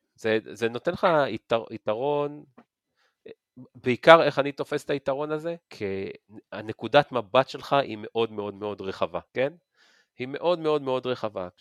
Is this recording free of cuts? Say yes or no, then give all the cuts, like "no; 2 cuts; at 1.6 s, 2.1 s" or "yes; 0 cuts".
no; 2 cuts; at 5.6 s, 9.3 s